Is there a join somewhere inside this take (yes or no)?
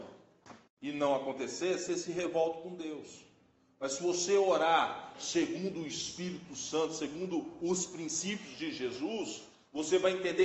no